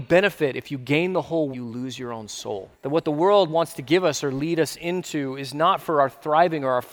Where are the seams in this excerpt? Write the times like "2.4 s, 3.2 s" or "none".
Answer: 1.5 s, 2.7 s